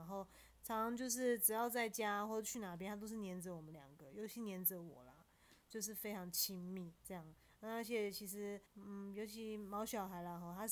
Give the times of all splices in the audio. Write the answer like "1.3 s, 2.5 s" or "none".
7.0 s, 8.7 s